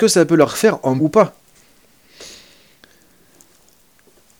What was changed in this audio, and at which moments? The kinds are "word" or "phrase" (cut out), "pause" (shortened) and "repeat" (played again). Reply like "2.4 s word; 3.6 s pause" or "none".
1.0 s word